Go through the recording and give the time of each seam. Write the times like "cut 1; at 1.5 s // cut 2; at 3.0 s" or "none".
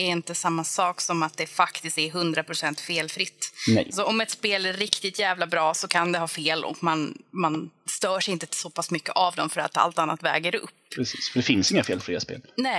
none